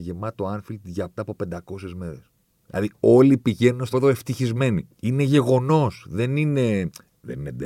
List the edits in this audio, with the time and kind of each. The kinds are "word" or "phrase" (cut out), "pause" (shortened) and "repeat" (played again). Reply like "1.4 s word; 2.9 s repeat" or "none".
1.2 s phrase; 3.9 s word; 4.9 s pause